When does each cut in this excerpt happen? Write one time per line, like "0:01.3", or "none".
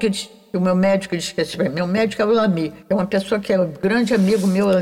0:02.8